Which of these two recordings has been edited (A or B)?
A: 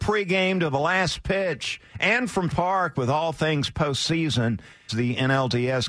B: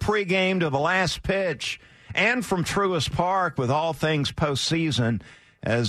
A